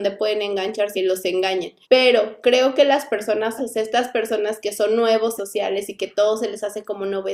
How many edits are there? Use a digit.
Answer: 4